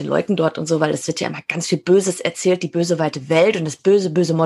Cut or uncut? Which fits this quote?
uncut